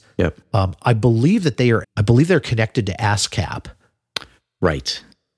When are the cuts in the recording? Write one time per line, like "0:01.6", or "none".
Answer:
0:01.8

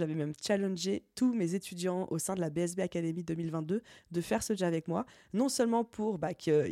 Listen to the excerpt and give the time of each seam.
0:04.6

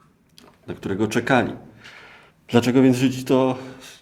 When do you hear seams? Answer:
0:02.3

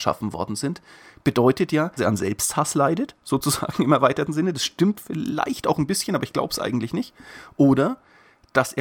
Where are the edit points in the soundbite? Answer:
0:02.0

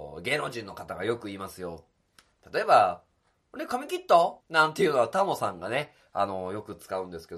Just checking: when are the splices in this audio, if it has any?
0:04.4

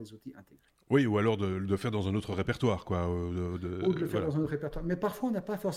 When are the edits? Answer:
none

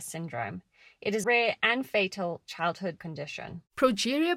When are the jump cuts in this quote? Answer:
0:01.2
0:03.0

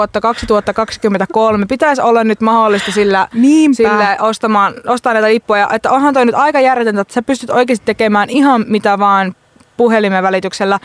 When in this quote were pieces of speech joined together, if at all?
none

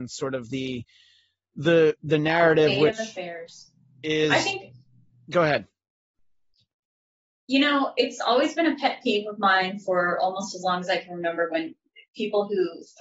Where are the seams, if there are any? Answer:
none

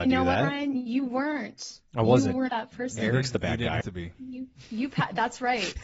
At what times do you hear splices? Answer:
0:02.5
0:03.8

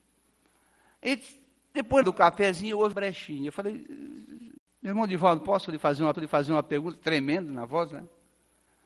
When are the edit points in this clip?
0:02.0
0:02.9
0:06.1

